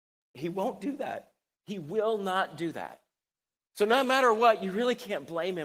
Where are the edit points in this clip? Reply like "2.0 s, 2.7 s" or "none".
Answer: none